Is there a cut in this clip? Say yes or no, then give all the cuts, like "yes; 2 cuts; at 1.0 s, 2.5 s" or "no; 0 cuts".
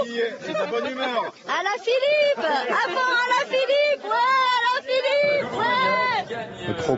no; 0 cuts